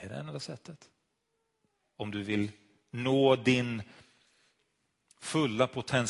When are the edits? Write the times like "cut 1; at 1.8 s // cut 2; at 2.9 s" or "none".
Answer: none